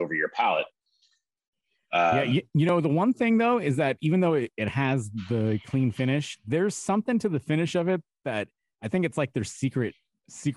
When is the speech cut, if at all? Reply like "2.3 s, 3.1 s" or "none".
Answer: none